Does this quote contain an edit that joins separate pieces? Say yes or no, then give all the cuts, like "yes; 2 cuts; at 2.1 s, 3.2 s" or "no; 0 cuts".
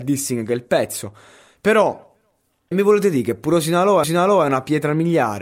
yes; 2 cuts; at 2.7 s, 4.0 s